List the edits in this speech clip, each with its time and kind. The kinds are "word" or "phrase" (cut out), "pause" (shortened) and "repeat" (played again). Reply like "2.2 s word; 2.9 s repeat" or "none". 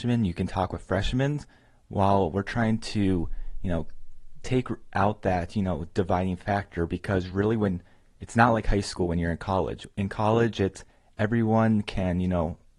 none